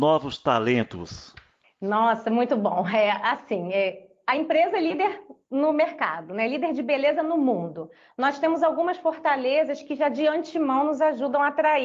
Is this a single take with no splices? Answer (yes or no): yes